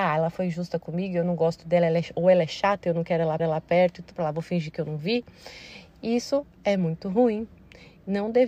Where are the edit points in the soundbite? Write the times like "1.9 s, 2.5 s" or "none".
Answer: 3.4 s, 4.1 s